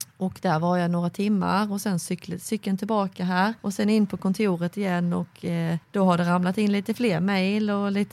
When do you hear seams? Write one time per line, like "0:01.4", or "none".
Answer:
0:03.6
0:05.8